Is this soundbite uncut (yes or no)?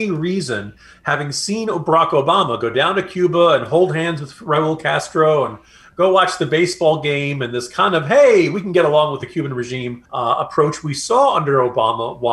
no